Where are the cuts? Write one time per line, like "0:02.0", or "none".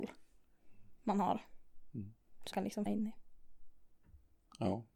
0:01.0
0:02.5
0:02.9